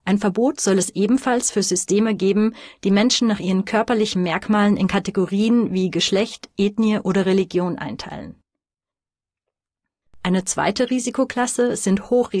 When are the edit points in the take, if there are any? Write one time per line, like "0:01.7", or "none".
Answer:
none

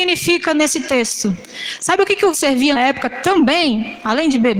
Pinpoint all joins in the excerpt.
0:02.3
0:02.8

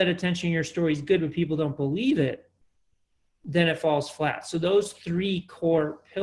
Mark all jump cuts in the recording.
none

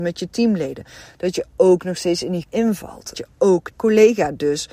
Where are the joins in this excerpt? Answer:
0:02.4
0:03.1
0:03.7

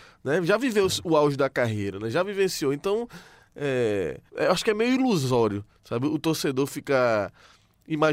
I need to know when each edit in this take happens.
0:04.3

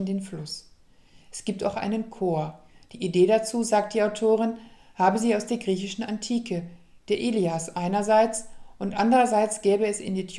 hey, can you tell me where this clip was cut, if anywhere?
none

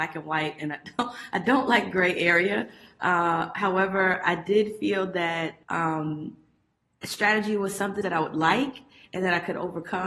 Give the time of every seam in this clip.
0:05.6
0:08.0

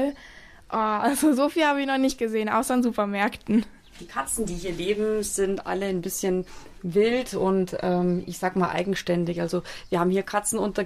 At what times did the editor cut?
none

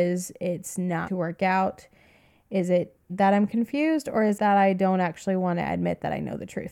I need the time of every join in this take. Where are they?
0:01.1
0:03.1
0:04.4

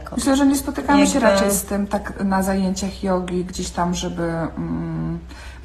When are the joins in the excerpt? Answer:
none

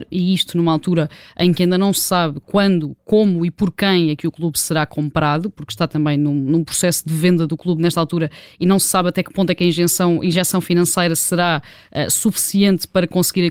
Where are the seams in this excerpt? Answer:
none

